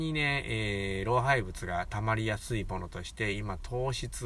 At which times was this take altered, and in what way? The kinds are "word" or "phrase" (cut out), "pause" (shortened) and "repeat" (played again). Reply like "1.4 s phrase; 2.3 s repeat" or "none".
none

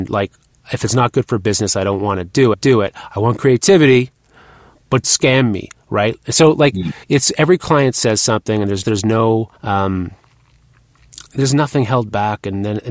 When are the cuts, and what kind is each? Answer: 2.5 s repeat; 5.0 s word; 7.0 s pause; 8.8 s word; 9.6 s pause

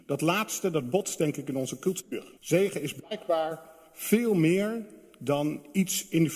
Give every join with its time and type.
2.4 s pause

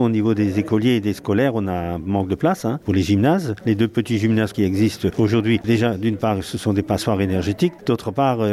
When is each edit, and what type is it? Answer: none

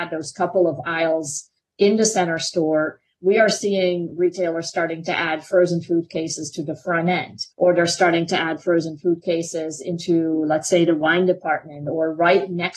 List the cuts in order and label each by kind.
7.5 s pause

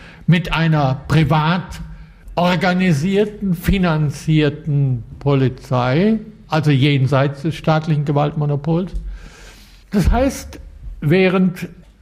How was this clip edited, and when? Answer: none

